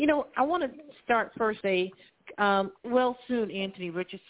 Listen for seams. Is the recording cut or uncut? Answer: cut